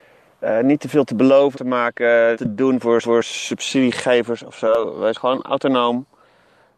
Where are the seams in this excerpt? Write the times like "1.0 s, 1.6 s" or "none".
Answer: 1.5 s, 2.3 s, 3.0 s, 5.1 s